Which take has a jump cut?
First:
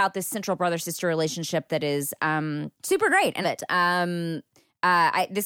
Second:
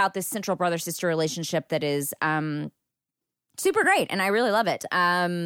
first; 2 cuts; at 2.8 s, 3.4 s

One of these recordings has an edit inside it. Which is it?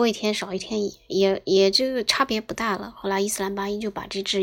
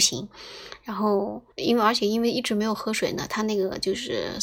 second; 1 cut; at 1.5 s

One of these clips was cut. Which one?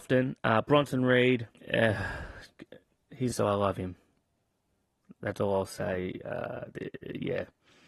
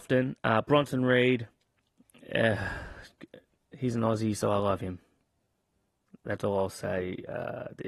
first; 2 cuts; at 1.5 s, 3.3 s

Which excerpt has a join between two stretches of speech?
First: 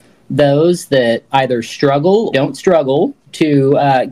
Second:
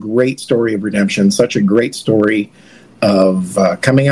first; 1 cut; at 2.3 s

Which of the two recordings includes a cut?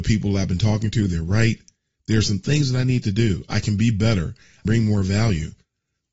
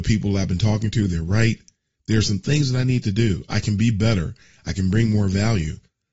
first; 1 cut; at 4.6 s

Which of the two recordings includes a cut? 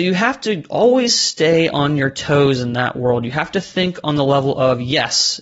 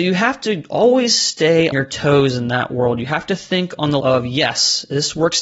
second; 2 cuts; at 1.7 s, 4.0 s

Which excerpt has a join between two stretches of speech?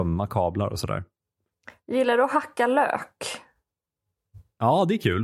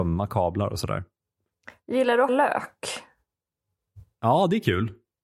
second; 1 cut; at 2.3 s

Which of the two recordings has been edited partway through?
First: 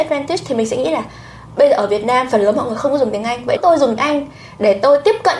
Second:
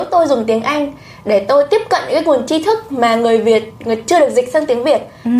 first; 2 cuts; at 3.6 s, 4.0 s

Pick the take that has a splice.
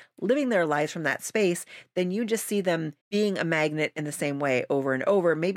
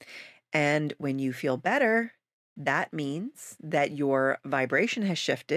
first; 1 cut; at 3.0 s

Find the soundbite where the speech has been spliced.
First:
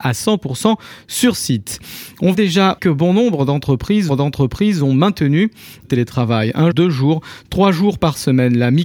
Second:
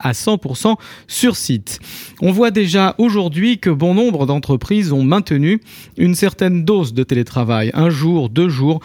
first; 5 cuts; at 2.3 s, 2.8 s, 4.1 s, 5.8 s, 6.7 s

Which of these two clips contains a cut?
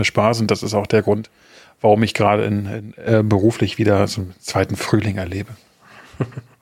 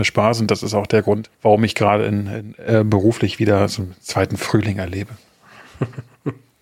second; 1 cut; at 1.3 s

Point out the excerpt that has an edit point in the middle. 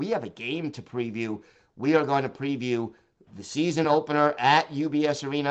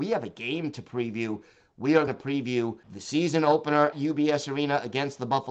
second; 3 cuts; at 2.1 s, 2.8 s, 3.9 s

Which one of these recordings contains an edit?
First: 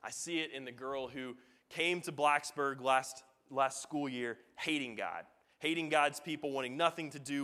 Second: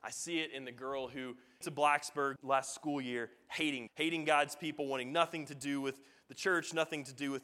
second; 3 cuts; at 1.6 s, 2.4 s, 3.9 s

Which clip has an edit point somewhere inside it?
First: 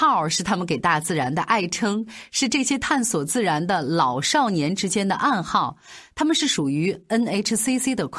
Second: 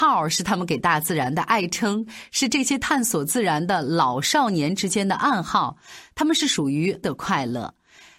second; 1 cut; at 7.0 s

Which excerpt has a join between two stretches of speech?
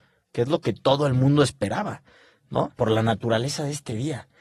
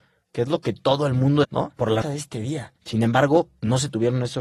second; 3 cuts; at 1.4 s, 2.0 s, 2.8 s

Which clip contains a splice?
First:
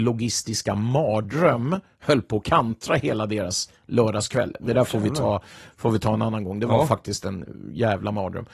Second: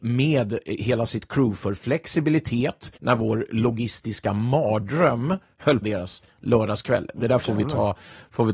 second; 2 cuts; at 3.0 s, 5.8 s

